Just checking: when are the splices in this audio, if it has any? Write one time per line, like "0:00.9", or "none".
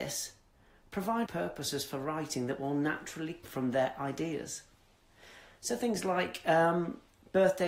0:01.3
0:03.4